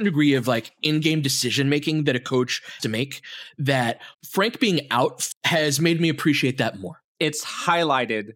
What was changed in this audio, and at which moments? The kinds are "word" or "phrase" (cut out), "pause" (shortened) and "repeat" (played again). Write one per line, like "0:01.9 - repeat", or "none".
0:02.8 - word
0:04.1 - pause
0:05.3 - phrase

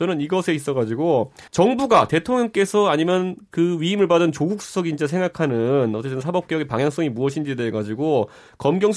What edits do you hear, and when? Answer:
0:01.5 - pause

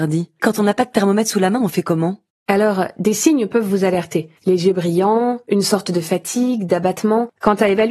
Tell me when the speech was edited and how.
0:04.4 - pause

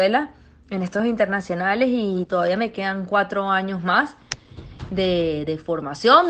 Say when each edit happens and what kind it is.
0:01.0 - word

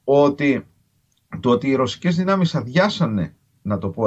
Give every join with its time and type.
none

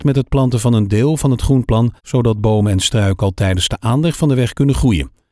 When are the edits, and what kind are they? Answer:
0:02.0 - pause

